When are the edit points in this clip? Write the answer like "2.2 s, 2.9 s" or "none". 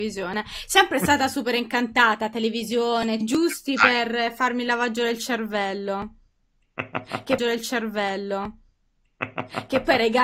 3.2 s, 7.4 s